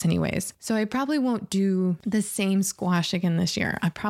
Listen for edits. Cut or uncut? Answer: uncut